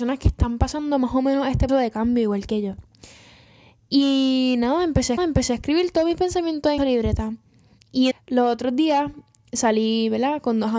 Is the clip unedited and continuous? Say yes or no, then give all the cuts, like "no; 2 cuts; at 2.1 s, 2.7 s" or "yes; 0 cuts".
no; 4 cuts; at 1.7 s, 5.2 s, 6.8 s, 8.1 s